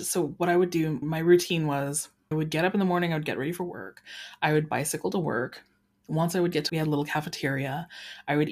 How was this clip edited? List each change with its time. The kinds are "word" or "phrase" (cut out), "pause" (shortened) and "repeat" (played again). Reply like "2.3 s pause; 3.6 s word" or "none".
1.0 s word; 2.3 s word; 6.7 s word